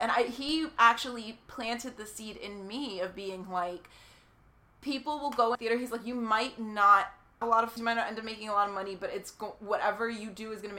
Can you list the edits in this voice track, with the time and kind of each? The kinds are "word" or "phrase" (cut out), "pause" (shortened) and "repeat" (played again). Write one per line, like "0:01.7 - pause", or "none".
0:05.5 - word
0:07.4 - word
0:07.8 - word